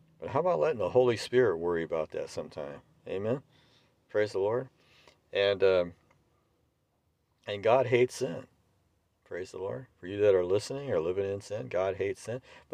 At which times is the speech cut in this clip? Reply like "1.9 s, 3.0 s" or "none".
none